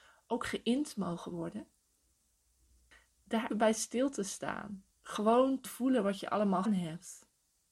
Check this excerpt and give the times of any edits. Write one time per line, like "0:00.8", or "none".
0:03.5
0:04.9
0:05.6
0:06.6